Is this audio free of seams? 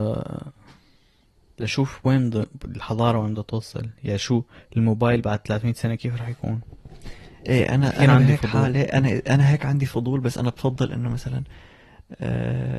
yes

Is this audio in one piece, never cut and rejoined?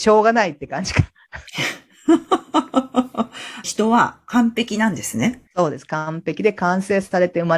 no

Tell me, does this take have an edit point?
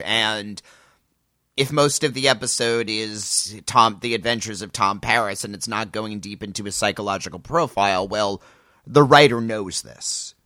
no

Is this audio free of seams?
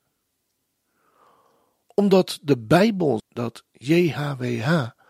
no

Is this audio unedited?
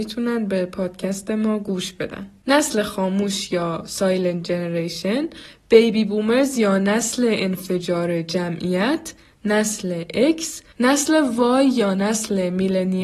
yes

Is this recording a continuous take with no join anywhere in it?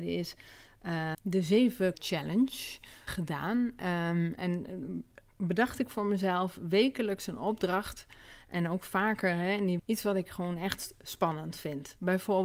no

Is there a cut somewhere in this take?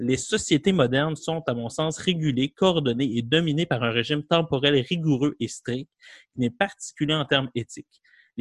no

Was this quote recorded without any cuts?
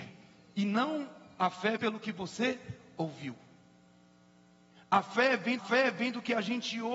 no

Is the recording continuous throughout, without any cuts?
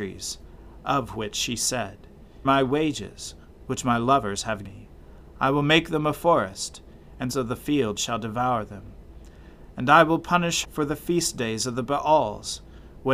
no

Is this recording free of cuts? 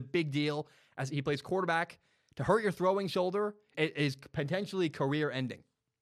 no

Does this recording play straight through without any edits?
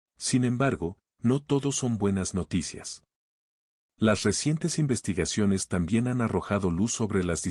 yes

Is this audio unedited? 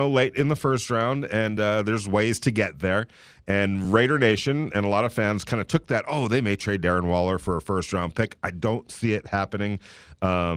yes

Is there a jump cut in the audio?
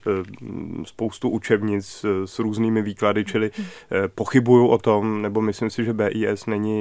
no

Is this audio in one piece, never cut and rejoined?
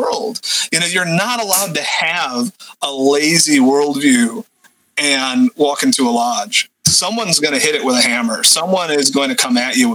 yes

